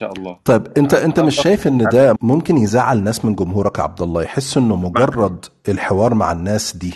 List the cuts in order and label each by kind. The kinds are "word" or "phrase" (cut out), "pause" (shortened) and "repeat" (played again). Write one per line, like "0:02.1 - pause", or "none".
0:02.2 - word

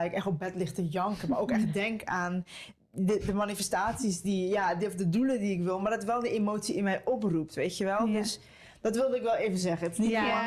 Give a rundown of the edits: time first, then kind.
none

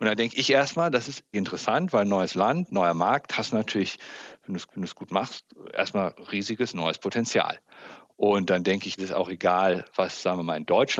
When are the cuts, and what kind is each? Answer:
0:01.3 - word
0:04.7 - repeat
0:09.0 - phrase

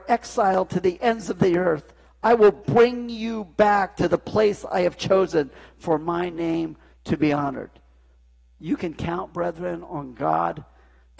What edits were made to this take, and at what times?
none

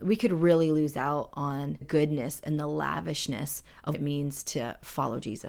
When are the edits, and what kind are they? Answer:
0:01.8 - word
0:03.9 - word

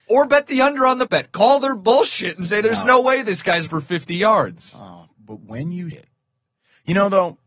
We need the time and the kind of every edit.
0:01.1 - word
0:03.7 - word
0:05.1 - word
0:05.9 - word

